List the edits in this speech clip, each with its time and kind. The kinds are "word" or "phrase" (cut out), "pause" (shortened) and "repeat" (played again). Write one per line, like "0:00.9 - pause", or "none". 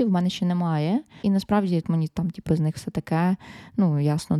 0:01.2 - word
0:01.8 - word
0:02.5 - word